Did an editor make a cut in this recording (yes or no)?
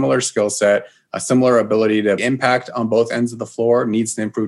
yes